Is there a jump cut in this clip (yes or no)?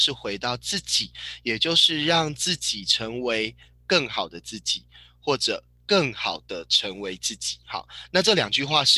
no